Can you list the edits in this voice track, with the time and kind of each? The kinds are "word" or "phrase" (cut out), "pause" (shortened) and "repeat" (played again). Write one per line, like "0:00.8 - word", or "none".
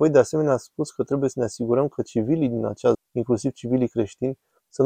0:02.9 - word